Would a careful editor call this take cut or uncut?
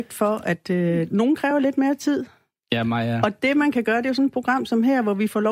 uncut